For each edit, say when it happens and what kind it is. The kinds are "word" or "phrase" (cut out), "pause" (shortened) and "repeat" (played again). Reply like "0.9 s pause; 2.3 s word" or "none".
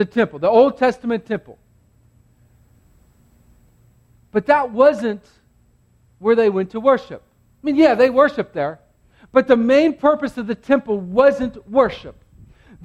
none